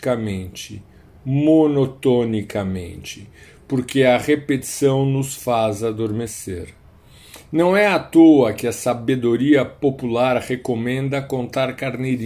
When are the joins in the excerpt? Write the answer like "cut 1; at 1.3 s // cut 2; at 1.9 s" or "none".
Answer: none